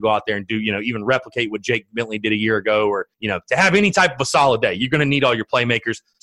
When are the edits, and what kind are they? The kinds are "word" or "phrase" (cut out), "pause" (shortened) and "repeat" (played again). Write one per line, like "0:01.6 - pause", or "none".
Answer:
0:03.1 - pause